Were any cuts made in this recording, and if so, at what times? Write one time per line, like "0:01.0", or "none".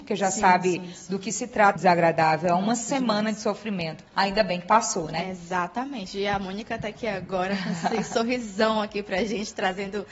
0:01.8
0:04.1